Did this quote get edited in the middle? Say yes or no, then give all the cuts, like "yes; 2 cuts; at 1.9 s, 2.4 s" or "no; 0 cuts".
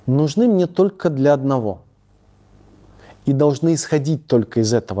no; 0 cuts